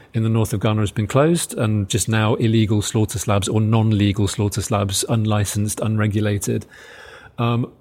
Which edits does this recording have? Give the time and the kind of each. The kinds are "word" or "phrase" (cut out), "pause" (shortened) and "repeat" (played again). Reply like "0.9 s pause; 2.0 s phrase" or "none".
1.9 s word